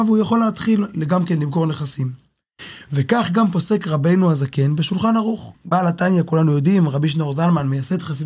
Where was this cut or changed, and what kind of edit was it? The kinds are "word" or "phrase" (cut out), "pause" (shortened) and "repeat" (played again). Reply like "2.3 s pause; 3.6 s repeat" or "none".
5.5 s pause

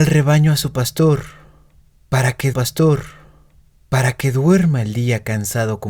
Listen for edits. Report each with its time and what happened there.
2.5 s repeat

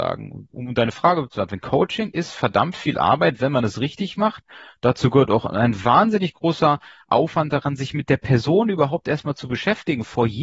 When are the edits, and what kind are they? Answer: none

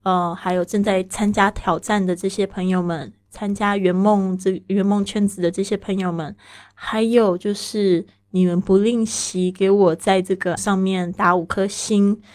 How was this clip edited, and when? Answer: 10.6 s word

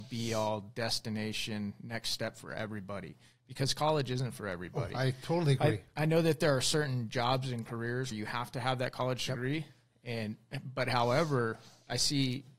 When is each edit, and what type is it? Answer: 8.1 s word

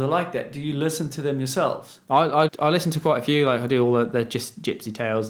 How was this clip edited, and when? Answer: 2.5 s word

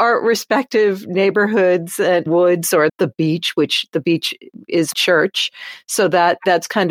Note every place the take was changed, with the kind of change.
2.3 s word; 2.9 s word; 4.9 s word

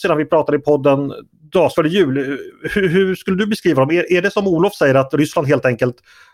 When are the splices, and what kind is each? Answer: 1.7 s word

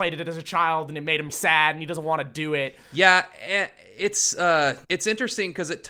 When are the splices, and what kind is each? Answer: 1.3 s word; 4.8 s pause

